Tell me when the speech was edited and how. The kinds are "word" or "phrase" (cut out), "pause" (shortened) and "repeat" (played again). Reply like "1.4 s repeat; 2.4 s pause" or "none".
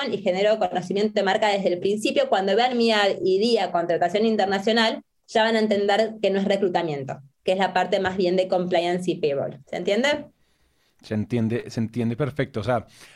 9.6 s pause

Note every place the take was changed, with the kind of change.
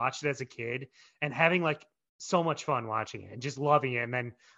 none

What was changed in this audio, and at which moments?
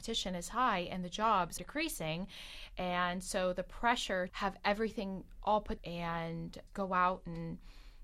1.6 s word; 4.3 s word; 5.8 s word; 6.7 s word

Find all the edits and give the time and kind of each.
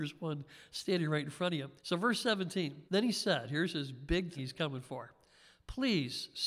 1.8 s pause; 2.9 s pause; 4.4 s word

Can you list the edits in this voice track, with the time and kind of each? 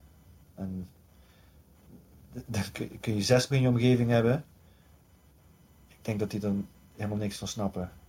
3.5 s word

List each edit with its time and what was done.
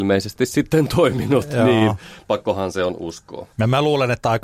3.5 s pause

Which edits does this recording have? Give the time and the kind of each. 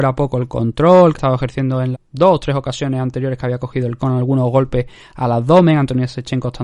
1.1 s word; 1.9 s word; 4.0 s word

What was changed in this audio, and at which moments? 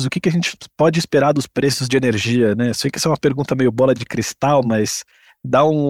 none

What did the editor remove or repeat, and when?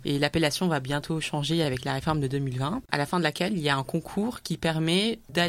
none

